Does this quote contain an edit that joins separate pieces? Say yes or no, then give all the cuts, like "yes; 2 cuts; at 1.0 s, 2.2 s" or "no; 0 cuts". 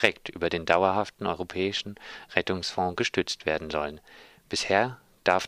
no; 0 cuts